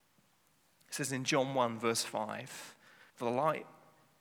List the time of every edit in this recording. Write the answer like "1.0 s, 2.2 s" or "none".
3.1 s